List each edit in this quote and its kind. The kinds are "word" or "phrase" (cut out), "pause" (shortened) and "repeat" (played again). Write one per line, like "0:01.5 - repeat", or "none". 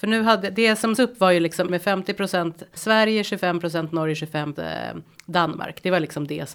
0:01.0 - word
0:01.7 - word
0:02.8 - word
0:04.5 - word

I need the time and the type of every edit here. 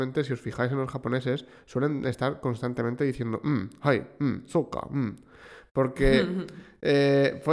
none

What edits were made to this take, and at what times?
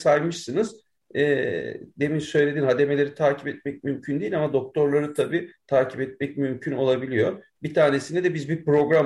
none

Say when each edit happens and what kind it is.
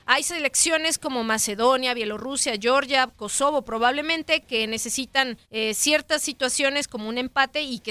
0:05.4 - pause

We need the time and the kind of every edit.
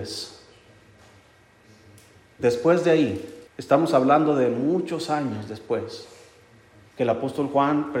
0:03.5 - pause

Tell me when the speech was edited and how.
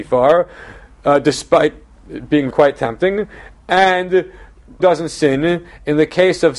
0:02.5 - word
0:04.8 - word

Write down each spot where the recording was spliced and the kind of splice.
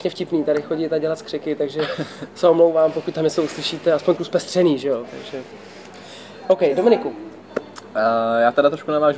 0:04.2 - phrase

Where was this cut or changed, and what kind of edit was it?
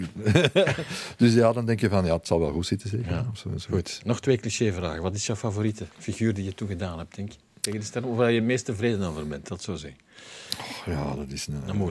0:05.9 - pause

